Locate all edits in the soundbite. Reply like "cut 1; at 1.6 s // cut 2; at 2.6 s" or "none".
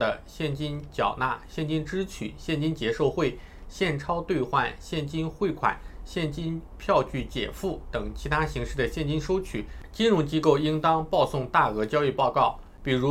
none

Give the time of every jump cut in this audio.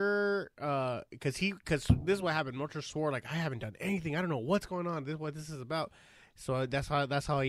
none

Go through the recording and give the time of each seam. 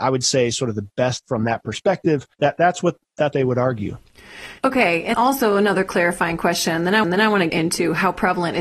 cut 1; at 1.2 s // cut 2; at 2.3 s // cut 3; at 3.3 s // cut 4; at 4.6 s // cut 5; at 5.1 s // cut 6; at 7.0 s // cut 7; at 7.5 s

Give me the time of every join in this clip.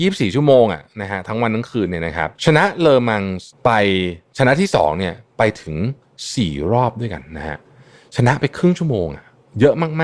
cut 1; at 2.4 s // cut 2; at 3.5 s

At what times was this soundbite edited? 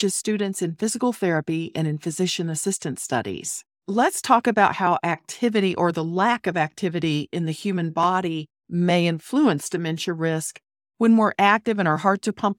cut 1; at 8.6 s

